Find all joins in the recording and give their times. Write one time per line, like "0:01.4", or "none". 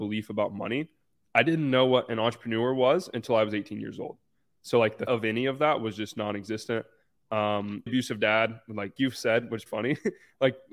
0:05.1
0:07.9
0:09.0
0:09.7

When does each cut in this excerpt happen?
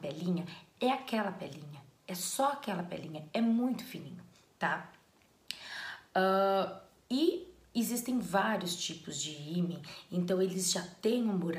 none

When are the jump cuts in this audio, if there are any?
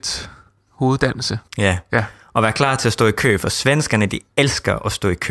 0:01.5

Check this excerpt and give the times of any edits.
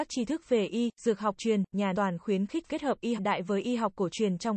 0:01.4
0:01.9
0:02.7
0:03.2

